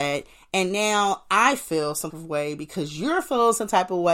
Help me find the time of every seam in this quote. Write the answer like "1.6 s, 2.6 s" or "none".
2.1 s

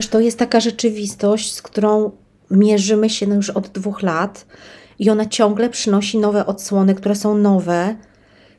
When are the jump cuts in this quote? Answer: none

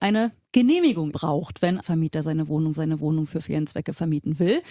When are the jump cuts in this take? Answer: 1.1 s, 1.8 s, 2.8 s

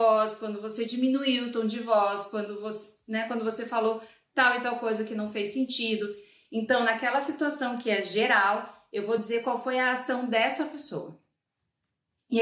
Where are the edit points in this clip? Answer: none

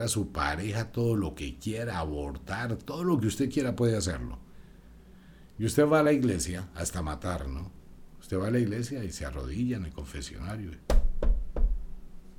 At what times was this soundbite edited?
none

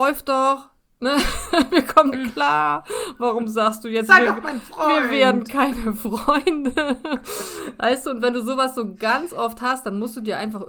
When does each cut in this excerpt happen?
2.1 s

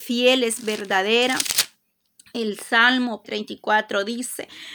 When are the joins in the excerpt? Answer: 3.2 s

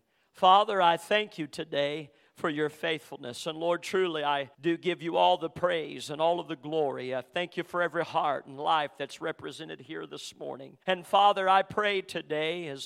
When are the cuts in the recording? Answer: 4.5 s, 10.8 s

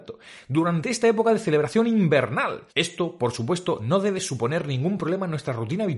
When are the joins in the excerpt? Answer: 2.7 s

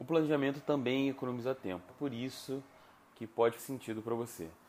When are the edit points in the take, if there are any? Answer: 1.9 s, 3.6 s

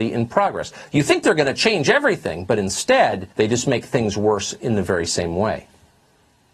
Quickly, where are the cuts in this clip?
3.3 s

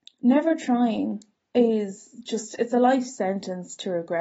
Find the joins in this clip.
none

